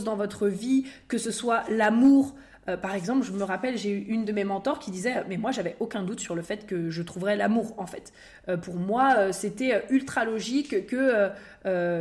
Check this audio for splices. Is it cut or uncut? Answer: uncut